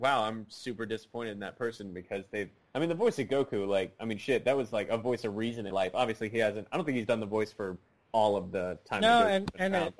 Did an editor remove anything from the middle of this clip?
yes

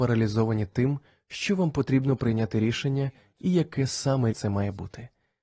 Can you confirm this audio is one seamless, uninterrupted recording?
no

